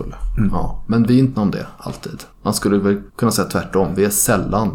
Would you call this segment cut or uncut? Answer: cut